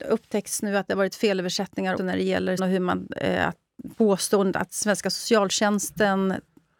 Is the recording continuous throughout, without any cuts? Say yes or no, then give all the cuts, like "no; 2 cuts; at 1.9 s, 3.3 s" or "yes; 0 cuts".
no; 3 cuts; at 2.0 s, 2.6 s, 3.9 s